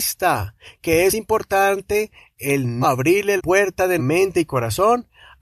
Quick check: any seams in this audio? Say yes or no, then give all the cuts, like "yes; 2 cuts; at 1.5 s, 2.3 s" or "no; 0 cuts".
yes; 4 cuts; at 1.1 s, 2.8 s, 3.4 s, 4.0 s